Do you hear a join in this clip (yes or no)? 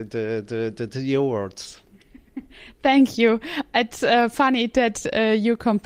no